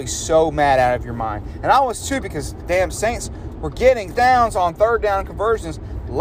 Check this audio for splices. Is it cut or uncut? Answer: cut